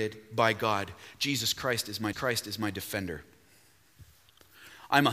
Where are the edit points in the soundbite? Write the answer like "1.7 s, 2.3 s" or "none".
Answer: 2.1 s